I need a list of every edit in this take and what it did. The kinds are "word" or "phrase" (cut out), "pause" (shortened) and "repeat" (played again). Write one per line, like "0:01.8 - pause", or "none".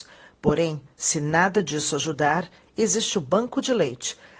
none